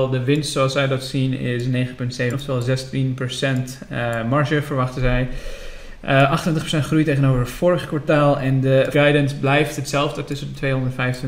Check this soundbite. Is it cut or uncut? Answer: cut